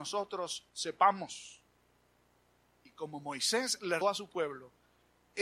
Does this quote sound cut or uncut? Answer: cut